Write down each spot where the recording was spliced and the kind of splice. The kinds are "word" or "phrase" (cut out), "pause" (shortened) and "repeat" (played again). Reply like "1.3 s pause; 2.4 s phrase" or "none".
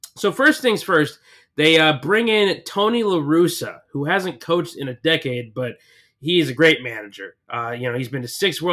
none